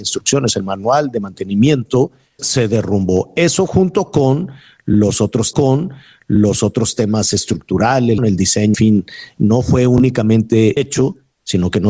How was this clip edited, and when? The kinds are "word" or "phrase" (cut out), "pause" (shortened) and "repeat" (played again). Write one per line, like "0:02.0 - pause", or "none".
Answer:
0:02.4 - word
0:05.5 - repeat
0:08.2 - phrase
0:08.7 - word
0:10.8 - phrase